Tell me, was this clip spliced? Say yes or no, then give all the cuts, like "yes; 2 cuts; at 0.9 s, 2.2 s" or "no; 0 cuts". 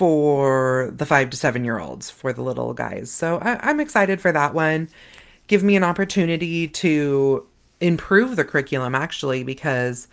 no; 0 cuts